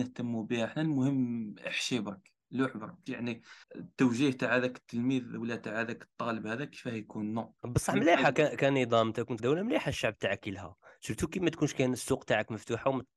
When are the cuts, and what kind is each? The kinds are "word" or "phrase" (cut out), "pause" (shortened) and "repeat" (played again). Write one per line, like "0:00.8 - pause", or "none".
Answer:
0:03.1 - phrase
0:03.6 - pause
0:07.6 - pause
0:09.4 - phrase